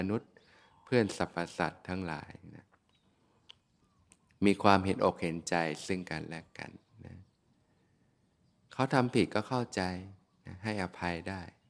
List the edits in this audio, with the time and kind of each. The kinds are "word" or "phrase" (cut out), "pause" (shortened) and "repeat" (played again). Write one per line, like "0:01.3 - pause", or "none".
none